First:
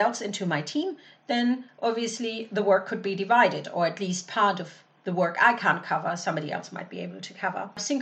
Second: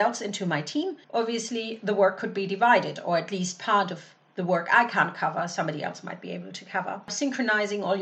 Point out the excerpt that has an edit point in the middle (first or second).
second